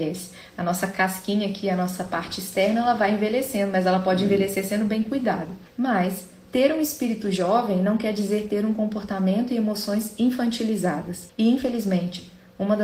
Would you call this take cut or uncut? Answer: uncut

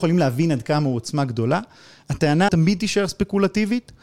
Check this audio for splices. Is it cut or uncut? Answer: cut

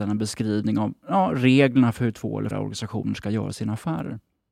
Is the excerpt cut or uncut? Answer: cut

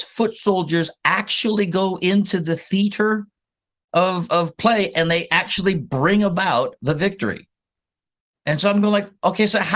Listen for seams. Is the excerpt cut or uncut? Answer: uncut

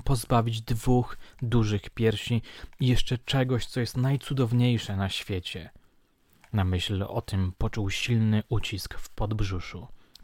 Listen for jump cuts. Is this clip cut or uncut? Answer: uncut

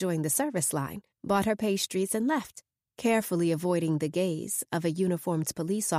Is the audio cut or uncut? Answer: cut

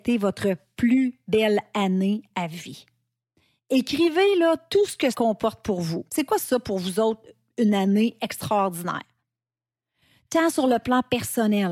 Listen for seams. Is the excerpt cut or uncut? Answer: cut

